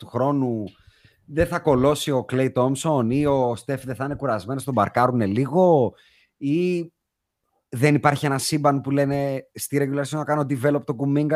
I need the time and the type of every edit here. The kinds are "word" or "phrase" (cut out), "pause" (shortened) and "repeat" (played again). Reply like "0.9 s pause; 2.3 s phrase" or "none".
none